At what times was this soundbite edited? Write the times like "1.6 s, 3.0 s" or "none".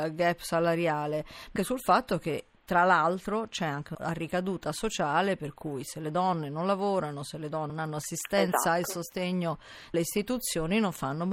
1.6 s, 3.9 s, 7.7 s, 9.9 s